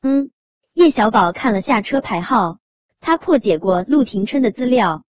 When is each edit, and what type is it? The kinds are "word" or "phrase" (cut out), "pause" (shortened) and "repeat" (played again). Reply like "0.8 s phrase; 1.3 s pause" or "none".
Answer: none